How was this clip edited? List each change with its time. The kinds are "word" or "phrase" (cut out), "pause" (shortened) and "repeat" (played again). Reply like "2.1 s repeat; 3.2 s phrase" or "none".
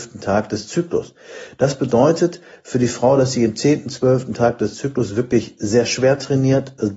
none